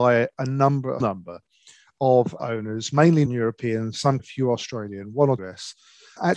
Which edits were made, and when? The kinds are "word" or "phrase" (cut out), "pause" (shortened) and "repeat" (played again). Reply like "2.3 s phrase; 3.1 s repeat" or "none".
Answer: 1.0 s word; 2.4 s word; 3.3 s word; 4.2 s word; 5.4 s word